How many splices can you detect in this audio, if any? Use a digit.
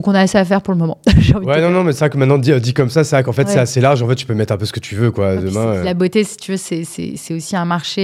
0